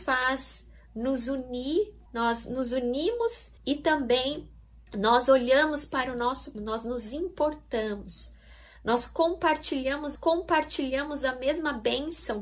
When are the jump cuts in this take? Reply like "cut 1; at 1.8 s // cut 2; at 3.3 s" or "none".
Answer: cut 1; at 2.1 s // cut 2; at 3.6 s // cut 3; at 4.9 s // cut 4; at 6.5 s // cut 5; at 10.1 s